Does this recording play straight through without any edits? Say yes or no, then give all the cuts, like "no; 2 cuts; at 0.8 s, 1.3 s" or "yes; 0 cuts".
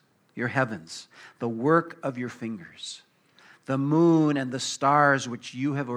yes; 0 cuts